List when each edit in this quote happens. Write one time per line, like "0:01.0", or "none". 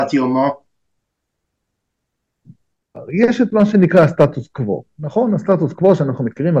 none